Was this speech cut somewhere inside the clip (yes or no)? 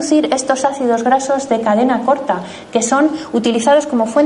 no